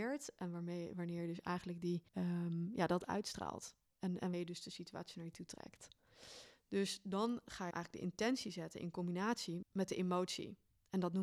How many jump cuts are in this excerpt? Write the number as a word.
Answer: four